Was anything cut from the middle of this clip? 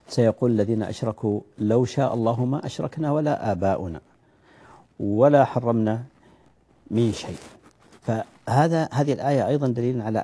no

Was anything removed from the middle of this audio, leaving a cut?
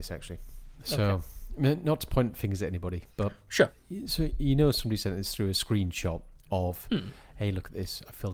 no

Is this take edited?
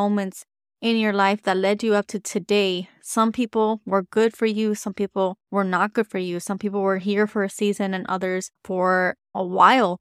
yes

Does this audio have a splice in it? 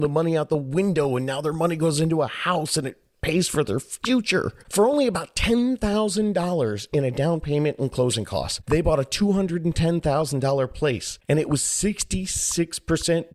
no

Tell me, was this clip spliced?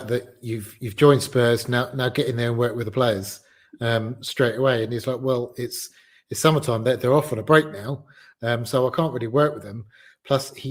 no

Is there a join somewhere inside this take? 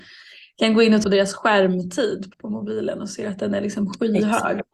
yes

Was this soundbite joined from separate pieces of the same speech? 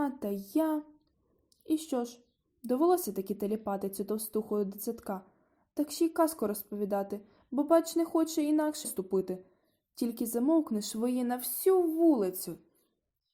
yes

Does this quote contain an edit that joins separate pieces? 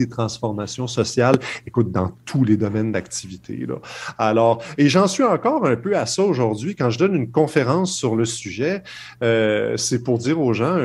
no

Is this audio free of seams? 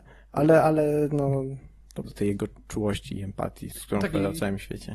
no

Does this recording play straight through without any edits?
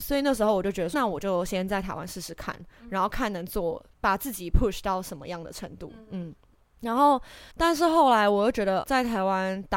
no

